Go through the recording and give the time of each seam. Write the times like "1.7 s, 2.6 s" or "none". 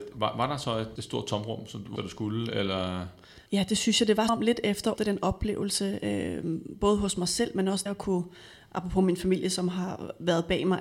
1.0 s, 2.0 s, 3.5 s, 4.3 s, 5.0 s, 7.9 s